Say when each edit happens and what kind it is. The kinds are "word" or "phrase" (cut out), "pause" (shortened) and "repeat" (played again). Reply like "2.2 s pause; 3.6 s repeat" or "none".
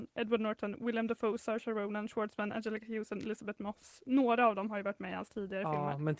none